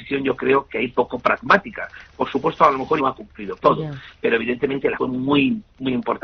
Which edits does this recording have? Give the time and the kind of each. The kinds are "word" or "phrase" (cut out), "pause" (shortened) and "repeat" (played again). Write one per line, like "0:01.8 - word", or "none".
0:03.0 - word
0:03.6 - word
0:05.0 - word